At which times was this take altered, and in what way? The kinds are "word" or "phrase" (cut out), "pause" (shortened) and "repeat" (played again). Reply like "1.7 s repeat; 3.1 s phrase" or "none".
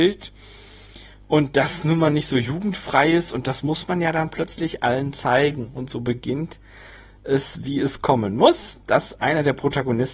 none